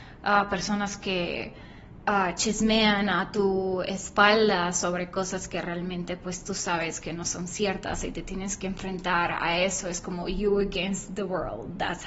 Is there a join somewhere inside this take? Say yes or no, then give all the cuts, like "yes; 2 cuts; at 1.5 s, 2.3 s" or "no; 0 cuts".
no; 0 cuts